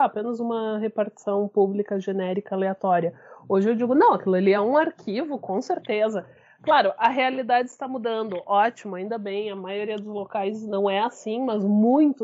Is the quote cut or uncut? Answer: uncut